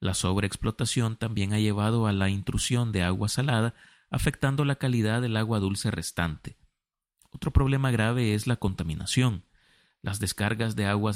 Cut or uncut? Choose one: uncut